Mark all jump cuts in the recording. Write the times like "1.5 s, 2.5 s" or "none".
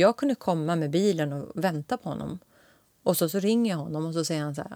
none